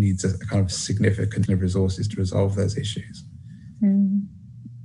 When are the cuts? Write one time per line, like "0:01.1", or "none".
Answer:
0:01.5

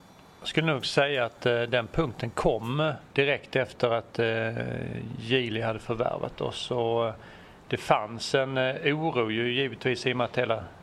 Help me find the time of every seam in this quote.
0:03.1

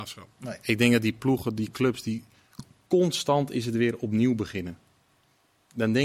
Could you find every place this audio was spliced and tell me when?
none

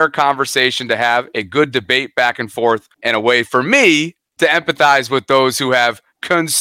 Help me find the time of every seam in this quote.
0:02.9
0:04.3

